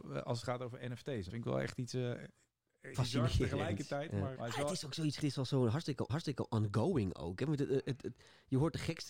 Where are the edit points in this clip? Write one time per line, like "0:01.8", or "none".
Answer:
0:01.3
0:02.9
0:04.4
0:05.2
0:06.1